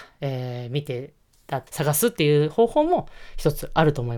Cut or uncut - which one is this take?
cut